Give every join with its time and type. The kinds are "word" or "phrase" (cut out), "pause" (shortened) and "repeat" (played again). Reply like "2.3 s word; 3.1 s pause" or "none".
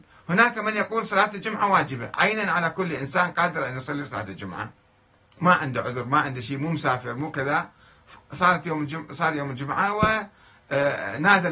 none